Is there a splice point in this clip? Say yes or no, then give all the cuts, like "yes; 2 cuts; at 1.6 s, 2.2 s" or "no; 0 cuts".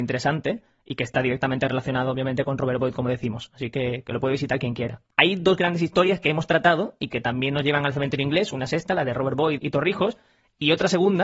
yes; 2 cuts; at 5.1 s, 9.6 s